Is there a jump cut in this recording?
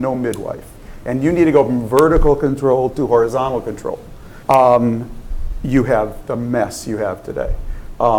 yes; 1 cut; at 4.4 s

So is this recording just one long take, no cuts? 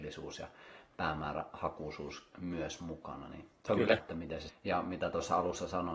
no; 2 cuts; at 4.0 s, 4.5 s

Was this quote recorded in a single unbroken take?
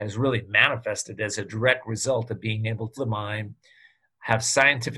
no; 1 cut; at 3.0 s

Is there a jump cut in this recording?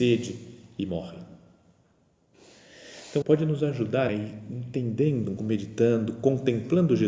yes; 3 cuts; at 3.2 s, 4.1 s, 5.4 s

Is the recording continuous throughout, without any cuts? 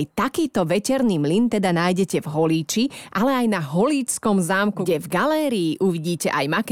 yes; 0 cuts

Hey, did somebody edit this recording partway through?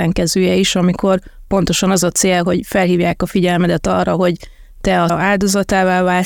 yes; 1 cut; at 5.1 s

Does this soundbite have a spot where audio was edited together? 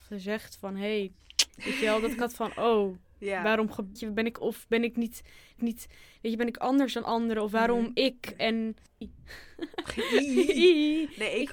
yes; 6 cuts; at 1.5 s, 3.0 s, 4.0 s, 4.3 s, 5.6 s, 9.0 s

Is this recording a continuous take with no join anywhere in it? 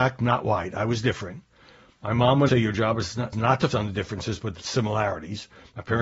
no; 3 cuts; at 2.5 s, 3.3 s, 3.7 s

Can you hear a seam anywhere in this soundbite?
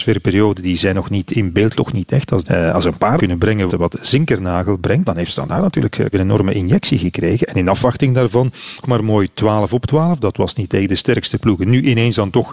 yes; 7 cuts; at 1.7 s, 2.4 s, 3.2 s, 3.7 s, 5.0 s, 6.1 s, 8.8 s

